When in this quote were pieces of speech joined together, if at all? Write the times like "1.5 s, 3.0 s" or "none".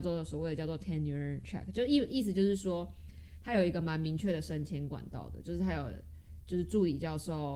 none